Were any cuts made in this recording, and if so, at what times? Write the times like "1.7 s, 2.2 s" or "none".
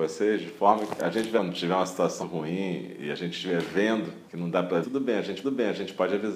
1.0 s, 1.4 s, 2.2 s, 4.3 s, 4.8 s, 5.4 s